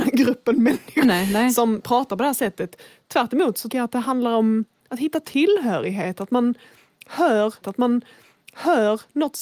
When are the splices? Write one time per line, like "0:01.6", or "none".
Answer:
0:01.0
0:03.7
0:07.6